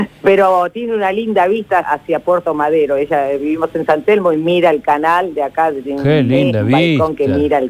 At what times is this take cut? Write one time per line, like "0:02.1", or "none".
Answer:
0:01.8

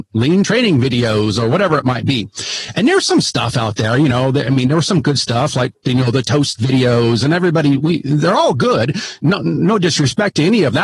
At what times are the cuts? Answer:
none

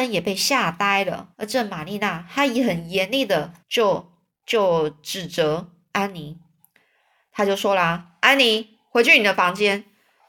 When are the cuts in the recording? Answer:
0:01.3
0:03.6

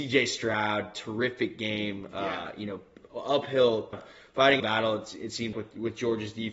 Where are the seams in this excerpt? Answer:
0:03.9
0:04.6
0:05.5

